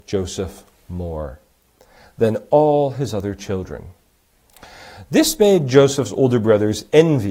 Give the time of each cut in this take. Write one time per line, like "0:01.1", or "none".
none

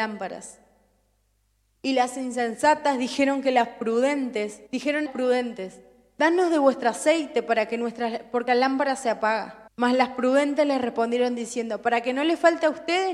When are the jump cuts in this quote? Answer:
0:04.7
0:05.1
0:08.5
0:09.7

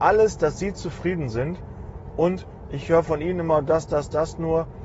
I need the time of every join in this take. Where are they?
none

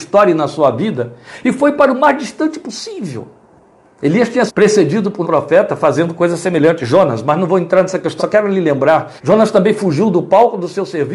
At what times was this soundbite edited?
0:03.5
0:04.5
0:05.2
0:08.2
0:09.2

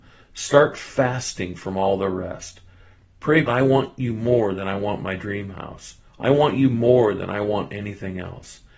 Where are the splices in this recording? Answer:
0:03.5
0:06.1

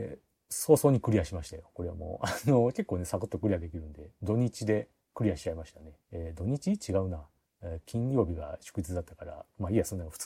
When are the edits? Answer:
0:06.0

